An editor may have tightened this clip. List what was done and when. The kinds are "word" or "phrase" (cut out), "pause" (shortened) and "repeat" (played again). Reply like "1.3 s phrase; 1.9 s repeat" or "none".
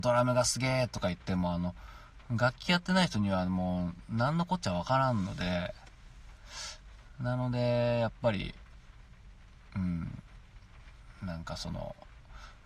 none